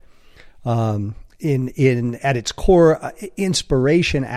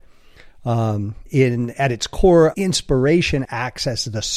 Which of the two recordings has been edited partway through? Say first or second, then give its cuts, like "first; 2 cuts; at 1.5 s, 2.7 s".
second; 3 cuts; at 1.3 s, 2.5 s, 3.4 s